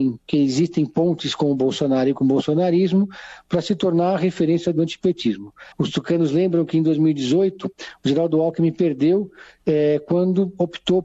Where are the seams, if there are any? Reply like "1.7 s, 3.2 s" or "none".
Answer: 5.7 s